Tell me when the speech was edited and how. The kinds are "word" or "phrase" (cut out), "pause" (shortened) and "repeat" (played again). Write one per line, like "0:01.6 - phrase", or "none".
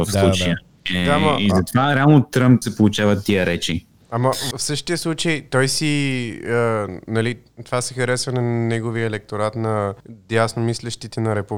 0:02.6 - word
0:04.5 - word
0:10.0 - pause